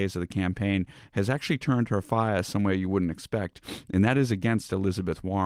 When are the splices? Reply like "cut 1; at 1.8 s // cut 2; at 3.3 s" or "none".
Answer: none